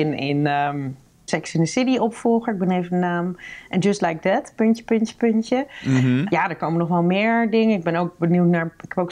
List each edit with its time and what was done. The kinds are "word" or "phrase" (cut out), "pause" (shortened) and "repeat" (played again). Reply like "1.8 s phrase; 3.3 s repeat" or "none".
none